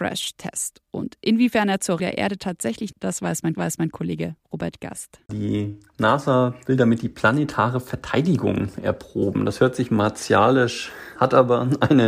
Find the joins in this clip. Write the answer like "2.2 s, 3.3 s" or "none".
2.0 s, 2.9 s, 3.5 s, 11.2 s